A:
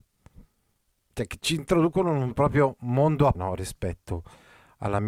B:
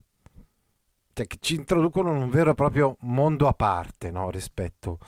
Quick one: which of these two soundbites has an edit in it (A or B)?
A